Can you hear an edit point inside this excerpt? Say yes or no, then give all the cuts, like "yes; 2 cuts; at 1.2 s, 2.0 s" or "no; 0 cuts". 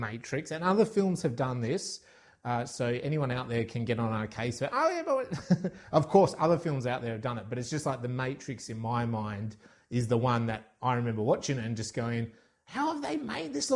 no; 0 cuts